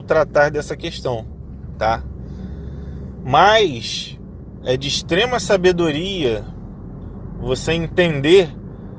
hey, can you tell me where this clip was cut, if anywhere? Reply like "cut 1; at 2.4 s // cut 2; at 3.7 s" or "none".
none